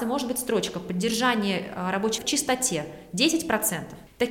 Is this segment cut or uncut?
cut